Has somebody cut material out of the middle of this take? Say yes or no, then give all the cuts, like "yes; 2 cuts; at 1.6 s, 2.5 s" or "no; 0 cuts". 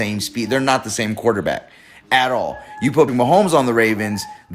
yes; 1 cut; at 3.1 s